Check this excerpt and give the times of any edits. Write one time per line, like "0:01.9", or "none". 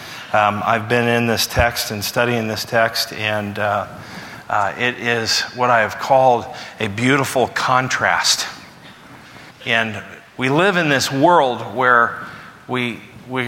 0:09.5